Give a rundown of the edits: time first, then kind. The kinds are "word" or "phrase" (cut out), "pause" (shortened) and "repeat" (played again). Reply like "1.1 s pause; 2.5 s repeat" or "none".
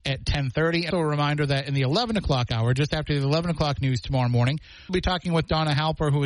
0.9 s word; 4.9 s word